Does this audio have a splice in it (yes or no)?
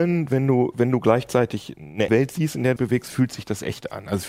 yes